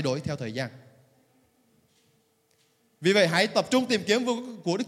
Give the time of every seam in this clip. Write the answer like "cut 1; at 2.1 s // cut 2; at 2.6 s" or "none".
none